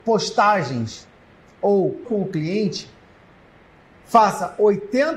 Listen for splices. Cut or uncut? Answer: cut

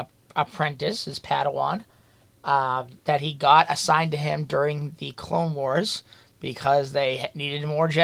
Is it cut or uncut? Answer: uncut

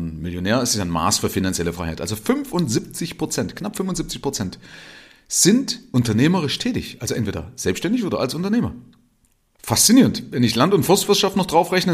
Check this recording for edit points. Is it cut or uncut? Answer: uncut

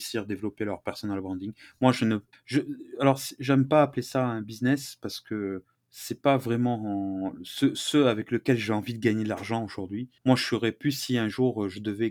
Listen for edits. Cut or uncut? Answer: cut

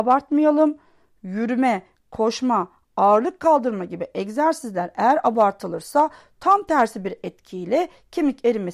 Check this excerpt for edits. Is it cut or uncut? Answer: uncut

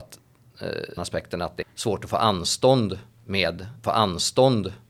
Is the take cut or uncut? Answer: cut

